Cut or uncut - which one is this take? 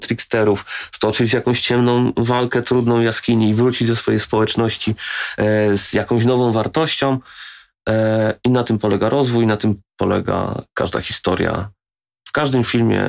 uncut